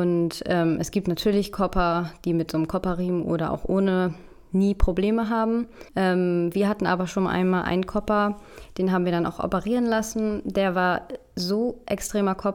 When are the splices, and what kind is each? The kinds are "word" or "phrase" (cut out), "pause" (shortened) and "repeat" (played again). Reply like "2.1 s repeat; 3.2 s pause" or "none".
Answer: 5.9 s pause